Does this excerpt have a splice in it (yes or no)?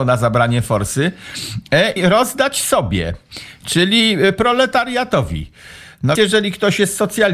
yes